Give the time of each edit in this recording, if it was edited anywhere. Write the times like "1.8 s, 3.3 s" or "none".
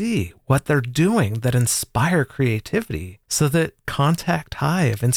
3.2 s, 3.9 s

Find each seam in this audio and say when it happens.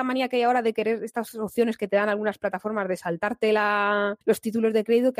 4.2 s

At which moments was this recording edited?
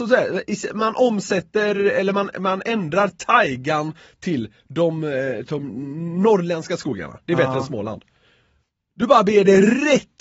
none

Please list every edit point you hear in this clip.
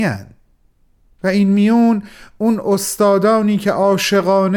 none

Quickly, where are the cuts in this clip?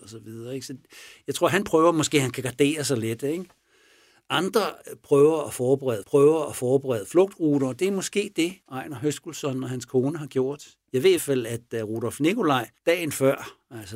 6.0 s, 8.6 s, 11.2 s, 12.8 s

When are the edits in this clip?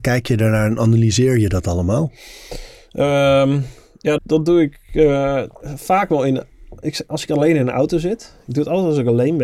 4.2 s, 5.5 s

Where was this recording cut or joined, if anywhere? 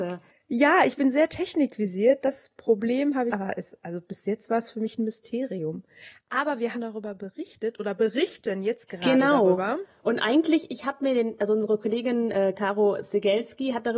3.3 s, 6.7 s

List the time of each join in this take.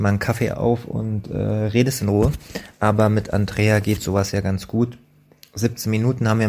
none

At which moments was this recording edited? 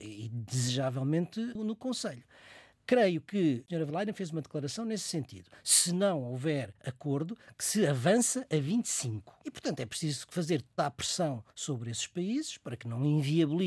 2.7 s, 3.9 s, 6.8 s, 9.4 s, 10.8 s

